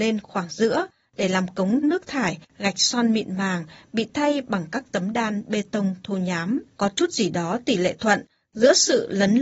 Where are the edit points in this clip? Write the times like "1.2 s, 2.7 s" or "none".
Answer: 1.8 s, 2.5 s, 6.7 s